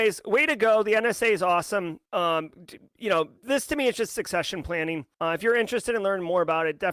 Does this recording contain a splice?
yes; 3 cuts; at 2.1 s, 3.4 s, 5.1 s

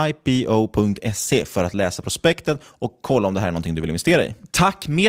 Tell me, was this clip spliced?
no; 0 cuts

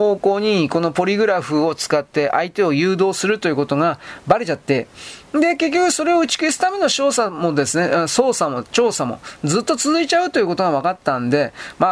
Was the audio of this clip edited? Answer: no; 0 cuts

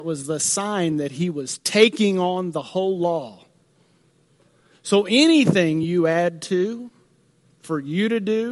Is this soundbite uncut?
yes; 0 cuts

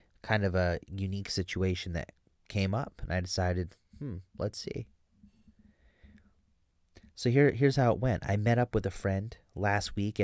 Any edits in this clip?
no; 0 cuts

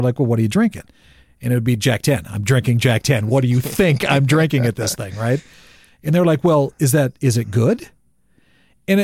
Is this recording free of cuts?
yes; 0 cuts

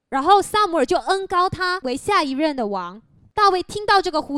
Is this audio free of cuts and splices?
yes; 0 cuts

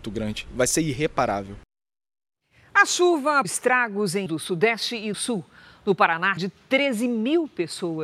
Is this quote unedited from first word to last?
no; 4 cuts; at 3.4 s, 4.3 s, 5.1 s, 6.4 s

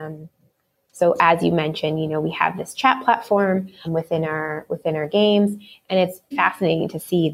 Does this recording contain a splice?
yes; 2 cuts; at 3.8 s, 6.3 s

